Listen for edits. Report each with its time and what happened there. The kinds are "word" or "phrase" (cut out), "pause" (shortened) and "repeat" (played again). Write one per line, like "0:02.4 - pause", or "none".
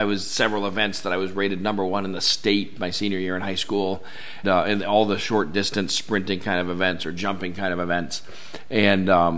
0:04.4 - word